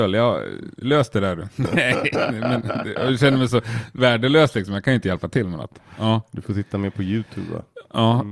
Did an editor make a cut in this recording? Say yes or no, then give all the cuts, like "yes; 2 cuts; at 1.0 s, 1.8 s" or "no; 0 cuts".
no; 0 cuts